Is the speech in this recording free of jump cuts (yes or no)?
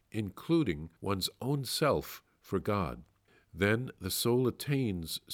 no